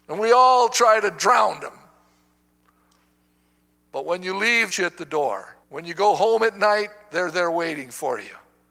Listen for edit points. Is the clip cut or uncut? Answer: cut